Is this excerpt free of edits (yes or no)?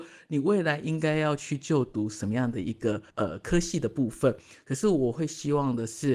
no